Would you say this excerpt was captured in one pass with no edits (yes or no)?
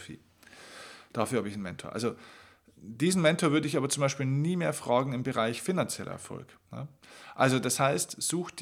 no